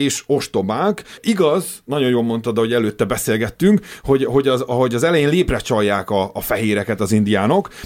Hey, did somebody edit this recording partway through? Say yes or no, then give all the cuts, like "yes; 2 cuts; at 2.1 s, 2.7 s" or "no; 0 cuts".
no; 0 cuts